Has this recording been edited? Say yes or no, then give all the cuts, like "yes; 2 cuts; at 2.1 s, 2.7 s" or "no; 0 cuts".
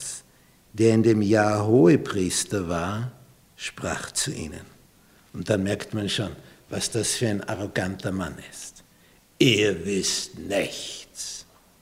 yes; 1 cut; at 3.4 s